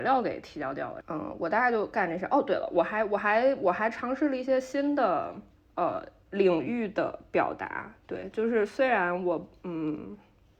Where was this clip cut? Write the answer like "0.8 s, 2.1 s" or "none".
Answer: 5.5 s